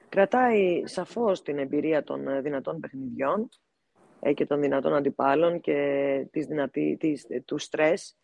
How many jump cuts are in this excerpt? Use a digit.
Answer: 0